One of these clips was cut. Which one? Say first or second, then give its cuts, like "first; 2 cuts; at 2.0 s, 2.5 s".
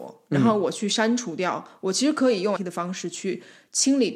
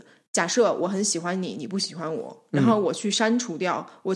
first; 1 cut; at 2.6 s